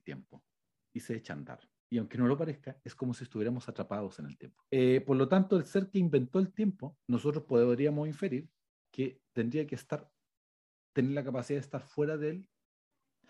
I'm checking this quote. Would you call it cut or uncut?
cut